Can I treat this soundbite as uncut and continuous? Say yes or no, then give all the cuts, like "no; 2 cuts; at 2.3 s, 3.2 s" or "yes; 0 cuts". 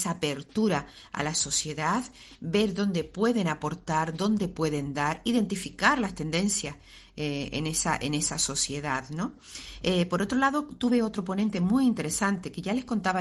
yes; 0 cuts